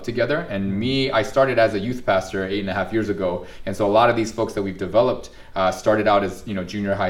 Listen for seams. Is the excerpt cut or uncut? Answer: uncut